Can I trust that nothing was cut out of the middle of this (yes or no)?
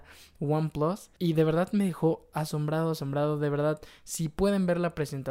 no